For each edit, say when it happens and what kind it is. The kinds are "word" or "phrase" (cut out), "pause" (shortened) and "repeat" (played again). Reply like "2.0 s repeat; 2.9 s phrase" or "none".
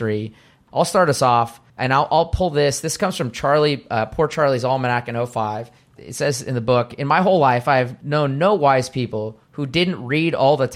1.7 s pause; 5.8 s pause; 9.4 s pause